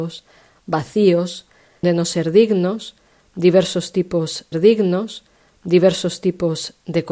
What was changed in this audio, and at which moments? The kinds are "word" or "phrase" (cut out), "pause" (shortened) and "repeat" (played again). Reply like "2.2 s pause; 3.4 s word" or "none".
1.8 s word; 4.5 s repeat